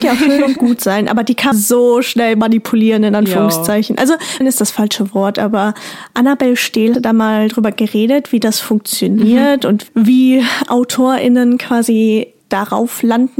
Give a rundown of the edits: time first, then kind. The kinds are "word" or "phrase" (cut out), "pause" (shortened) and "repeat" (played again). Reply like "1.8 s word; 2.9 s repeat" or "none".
1.5 s word; 4.4 s word; 6.9 s word; 12.4 s pause